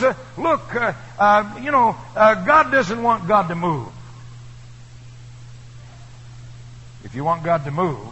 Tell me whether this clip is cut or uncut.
uncut